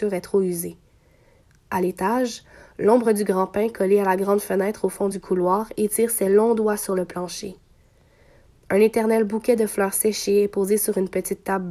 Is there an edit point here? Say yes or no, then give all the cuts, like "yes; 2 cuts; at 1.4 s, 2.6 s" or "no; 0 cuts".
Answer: no; 0 cuts